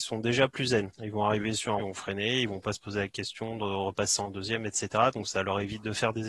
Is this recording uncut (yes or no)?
no